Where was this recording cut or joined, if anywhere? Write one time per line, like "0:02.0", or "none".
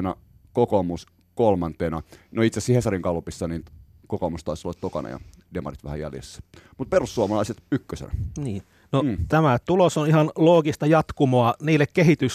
none

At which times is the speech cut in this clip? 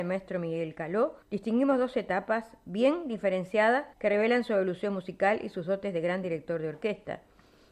0:01.2
0:03.9

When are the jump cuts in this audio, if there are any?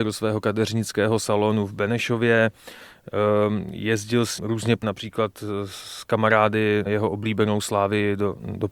0:04.4
0:04.8
0:06.9

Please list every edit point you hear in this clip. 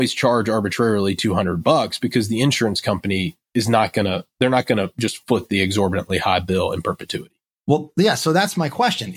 none

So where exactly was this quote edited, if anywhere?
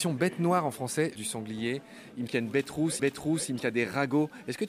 0:01.1
0:02.3
0:03.0
0:03.6

